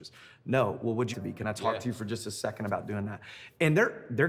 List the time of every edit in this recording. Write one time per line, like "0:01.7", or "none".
0:01.1